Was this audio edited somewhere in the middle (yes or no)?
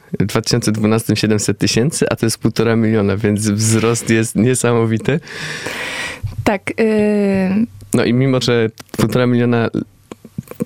yes